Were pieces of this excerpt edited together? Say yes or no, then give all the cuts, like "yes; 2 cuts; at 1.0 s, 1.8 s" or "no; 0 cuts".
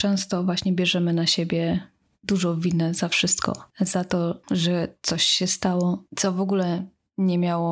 no; 0 cuts